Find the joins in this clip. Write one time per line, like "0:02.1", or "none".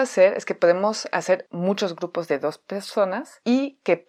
none